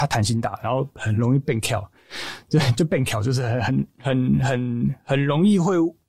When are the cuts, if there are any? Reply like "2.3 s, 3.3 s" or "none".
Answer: none